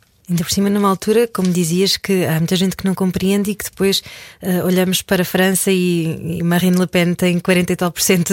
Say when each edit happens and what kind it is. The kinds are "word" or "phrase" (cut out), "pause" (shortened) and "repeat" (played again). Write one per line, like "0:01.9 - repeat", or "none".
none